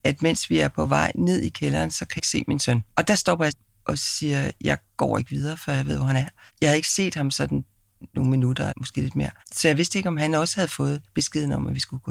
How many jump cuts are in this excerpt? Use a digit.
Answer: 6